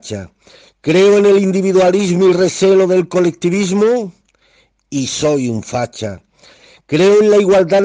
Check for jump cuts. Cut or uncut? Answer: uncut